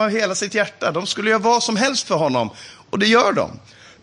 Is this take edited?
no; 0 cuts

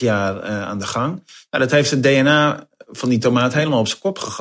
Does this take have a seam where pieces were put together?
no; 0 cuts

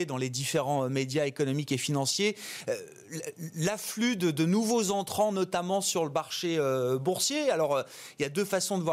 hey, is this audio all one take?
yes; 0 cuts

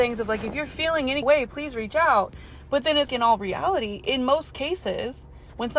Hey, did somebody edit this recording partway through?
yes; 2 cuts; at 1.2 s, 3.1 s

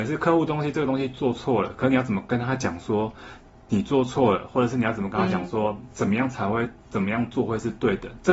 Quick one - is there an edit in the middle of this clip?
no; 0 cuts

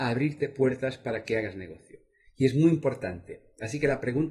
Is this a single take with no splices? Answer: yes; 0 cuts

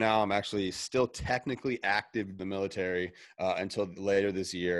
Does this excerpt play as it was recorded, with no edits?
no; 1 cut; at 2.4 s

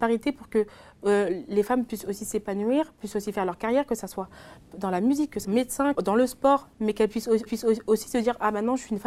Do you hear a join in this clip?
yes; 5 cuts; at 4.7 s, 5.4 s, 5.9 s, 6.7 s, 7.5 s

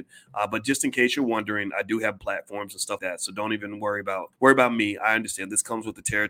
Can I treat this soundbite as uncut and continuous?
no; 3 cuts; at 2.2 s, 3.0 s, 4.3 s

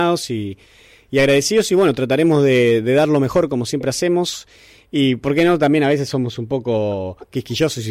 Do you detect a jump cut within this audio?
no; 0 cuts

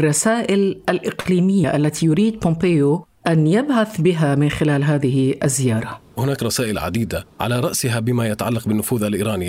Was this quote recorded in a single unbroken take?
yes; 0 cuts

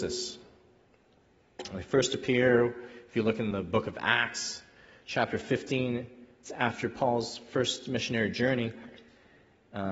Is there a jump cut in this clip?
no; 0 cuts

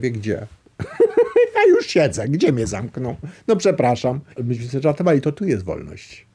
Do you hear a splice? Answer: yes; 1 cut; at 4.3 s

